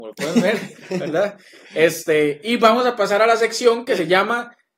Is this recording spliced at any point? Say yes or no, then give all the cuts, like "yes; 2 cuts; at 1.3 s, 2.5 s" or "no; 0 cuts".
no; 0 cuts